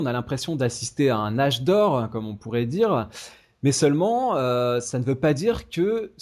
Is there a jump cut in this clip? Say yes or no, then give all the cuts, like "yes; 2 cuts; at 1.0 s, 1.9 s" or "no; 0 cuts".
no; 0 cuts